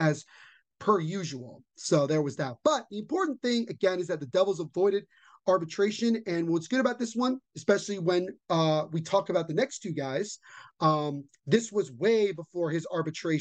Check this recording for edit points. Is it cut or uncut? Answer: cut